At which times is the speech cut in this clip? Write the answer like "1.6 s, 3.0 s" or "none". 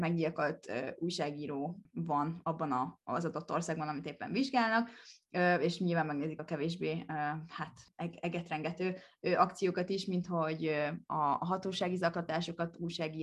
6.4 s